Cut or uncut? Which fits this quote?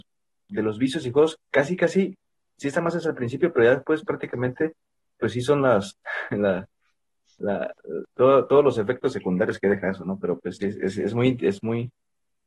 uncut